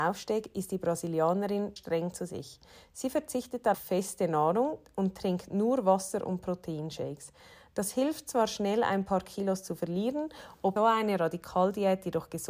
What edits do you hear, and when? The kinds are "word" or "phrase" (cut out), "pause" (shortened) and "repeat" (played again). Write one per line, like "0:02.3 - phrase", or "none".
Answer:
0:01.8 - word
0:03.7 - word
0:10.8 - word